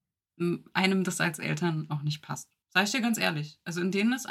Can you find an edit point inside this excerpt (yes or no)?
yes